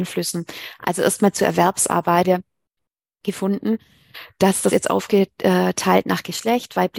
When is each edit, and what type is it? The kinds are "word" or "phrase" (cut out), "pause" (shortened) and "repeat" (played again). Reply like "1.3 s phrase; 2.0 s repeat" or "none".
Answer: 2.2 s word; 4.7 s word